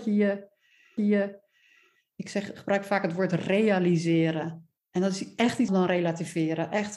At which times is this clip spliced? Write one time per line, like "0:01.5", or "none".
0:01.0
0:04.8
0:05.7